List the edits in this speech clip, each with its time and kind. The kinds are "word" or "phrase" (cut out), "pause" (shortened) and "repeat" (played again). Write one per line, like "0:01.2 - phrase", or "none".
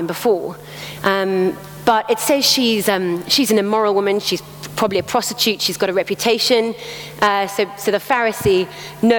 none